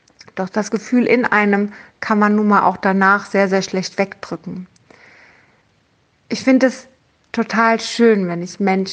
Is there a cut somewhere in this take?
no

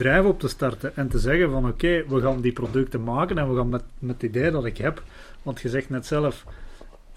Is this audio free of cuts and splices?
yes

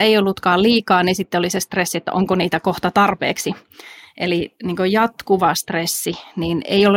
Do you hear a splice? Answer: no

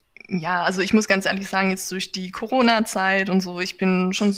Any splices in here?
no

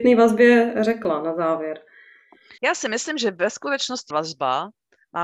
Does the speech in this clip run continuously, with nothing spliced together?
no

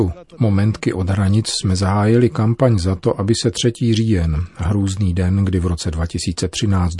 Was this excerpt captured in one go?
yes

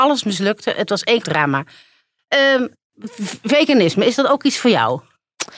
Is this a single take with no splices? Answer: no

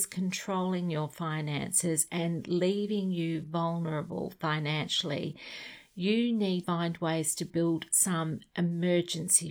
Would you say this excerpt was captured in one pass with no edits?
no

